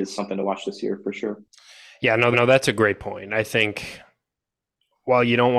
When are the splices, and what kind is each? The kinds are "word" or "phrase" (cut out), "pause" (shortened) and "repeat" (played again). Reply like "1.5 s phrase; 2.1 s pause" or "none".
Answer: 1.5 s pause; 2.3 s repeat